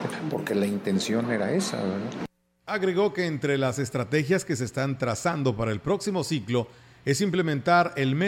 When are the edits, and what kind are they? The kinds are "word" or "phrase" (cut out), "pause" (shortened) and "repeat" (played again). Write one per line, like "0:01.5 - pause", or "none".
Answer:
none